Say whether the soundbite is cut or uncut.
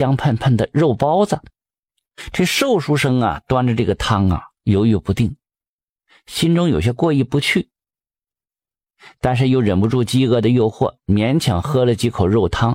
uncut